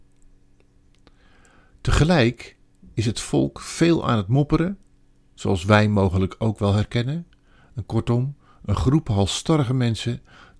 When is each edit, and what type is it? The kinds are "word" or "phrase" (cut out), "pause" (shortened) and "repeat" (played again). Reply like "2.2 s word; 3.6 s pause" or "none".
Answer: none